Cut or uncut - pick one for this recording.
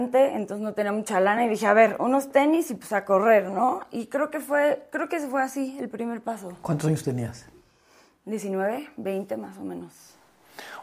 uncut